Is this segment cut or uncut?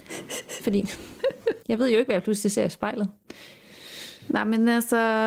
uncut